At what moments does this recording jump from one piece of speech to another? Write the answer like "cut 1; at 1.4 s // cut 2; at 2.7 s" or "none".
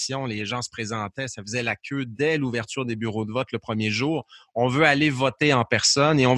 none